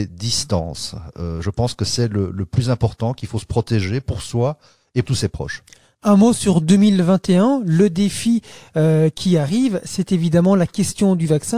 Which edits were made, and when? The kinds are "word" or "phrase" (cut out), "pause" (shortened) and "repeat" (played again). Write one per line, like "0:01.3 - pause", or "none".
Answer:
0:05.0 - word